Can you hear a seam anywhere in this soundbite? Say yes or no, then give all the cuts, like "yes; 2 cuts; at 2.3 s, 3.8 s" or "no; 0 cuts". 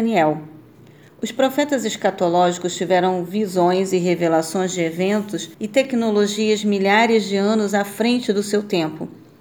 yes; 1 cut; at 5.5 s